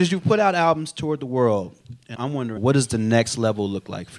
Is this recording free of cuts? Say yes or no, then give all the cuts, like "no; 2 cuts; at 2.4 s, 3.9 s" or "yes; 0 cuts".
no; 2 cuts; at 2.1 s, 2.6 s